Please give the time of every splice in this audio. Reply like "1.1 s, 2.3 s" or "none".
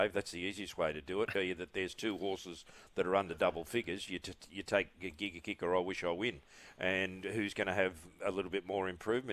1.3 s